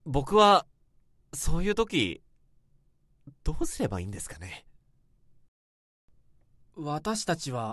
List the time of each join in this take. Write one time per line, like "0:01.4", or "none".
none

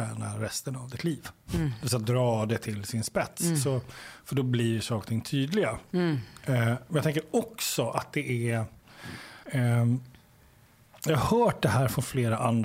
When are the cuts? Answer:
0:09.4

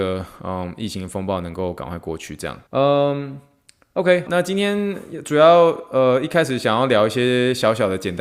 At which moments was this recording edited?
0:02.7
0:04.3

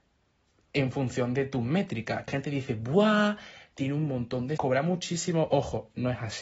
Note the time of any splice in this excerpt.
0:02.3
0:04.6

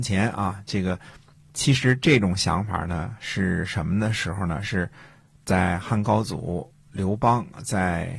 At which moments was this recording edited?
none

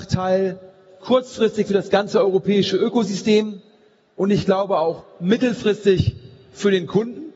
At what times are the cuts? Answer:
none

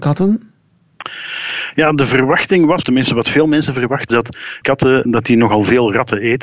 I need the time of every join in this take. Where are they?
0:02.8
0:04.1
0:04.6
0:05.1

